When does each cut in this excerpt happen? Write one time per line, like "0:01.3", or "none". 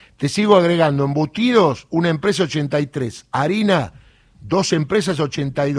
none